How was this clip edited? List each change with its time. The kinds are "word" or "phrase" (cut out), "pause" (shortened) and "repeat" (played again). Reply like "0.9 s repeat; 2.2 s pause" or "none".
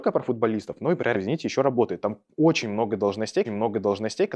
1.1 s phrase; 3.4 s repeat